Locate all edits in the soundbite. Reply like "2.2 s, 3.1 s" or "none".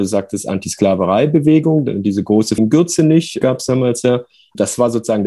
2.6 s, 3.4 s